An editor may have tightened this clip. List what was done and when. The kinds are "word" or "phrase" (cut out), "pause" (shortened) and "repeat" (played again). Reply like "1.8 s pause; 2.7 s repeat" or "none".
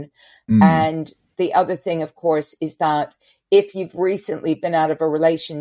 none